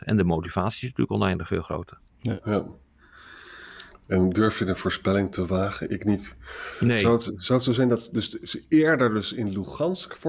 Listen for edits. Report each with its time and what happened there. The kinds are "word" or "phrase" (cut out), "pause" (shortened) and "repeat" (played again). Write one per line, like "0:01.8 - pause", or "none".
none